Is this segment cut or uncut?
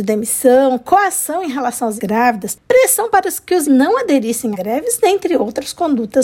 cut